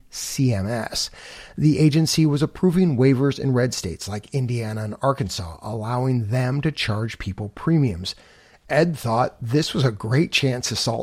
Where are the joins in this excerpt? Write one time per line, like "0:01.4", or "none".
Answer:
none